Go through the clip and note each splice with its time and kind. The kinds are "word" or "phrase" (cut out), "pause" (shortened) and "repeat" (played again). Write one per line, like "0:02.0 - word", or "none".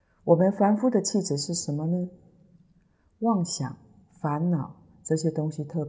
none